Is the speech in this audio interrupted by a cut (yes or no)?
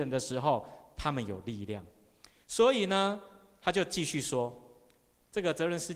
no